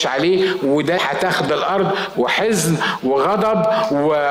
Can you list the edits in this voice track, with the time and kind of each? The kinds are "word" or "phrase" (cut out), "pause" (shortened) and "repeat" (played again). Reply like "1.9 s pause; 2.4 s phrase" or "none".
1.0 s word; 1.5 s word; 2.1 s word